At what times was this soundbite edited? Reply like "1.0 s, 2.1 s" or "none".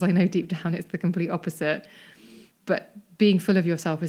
2.5 s